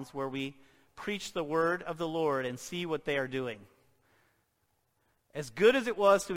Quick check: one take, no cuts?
yes; 0 cuts

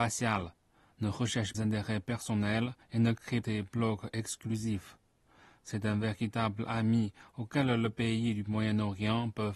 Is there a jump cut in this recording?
yes; 3 cuts; at 1.5 s, 2.8 s, 3.4 s

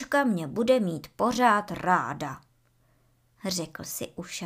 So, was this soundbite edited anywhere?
no; 0 cuts

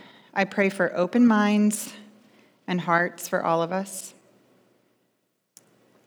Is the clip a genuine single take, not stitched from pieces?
yes; 0 cuts

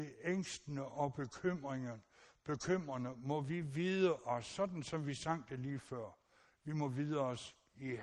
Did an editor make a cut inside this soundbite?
no; 0 cuts

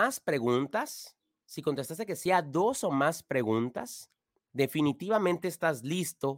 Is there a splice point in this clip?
no; 0 cuts

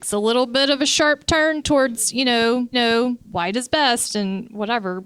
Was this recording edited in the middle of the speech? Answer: yes; 1 cut; at 2.7 s

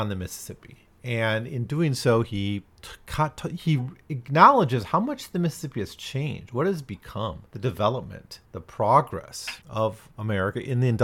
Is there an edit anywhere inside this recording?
yes; 4 cuts; at 2.7 s, 7.5 s, 8.5 s, 9.6 s

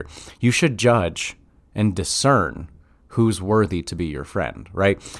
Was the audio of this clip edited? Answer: no; 0 cuts

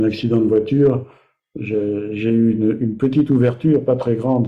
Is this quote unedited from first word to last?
yes; 0 cuts

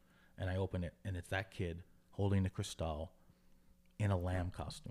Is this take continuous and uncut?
yes; 0 cuts

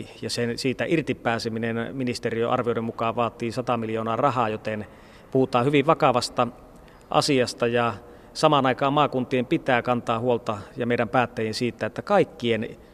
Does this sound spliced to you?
no; 0 cuts

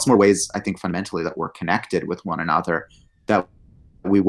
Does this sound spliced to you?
no; 0 cuts

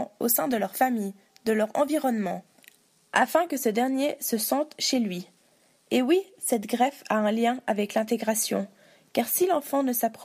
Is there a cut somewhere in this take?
no; 0 cuts

